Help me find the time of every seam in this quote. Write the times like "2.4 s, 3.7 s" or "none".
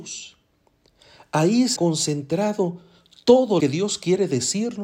1.8 s, 3.6 s